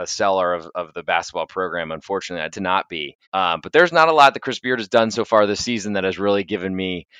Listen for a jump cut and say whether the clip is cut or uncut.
cut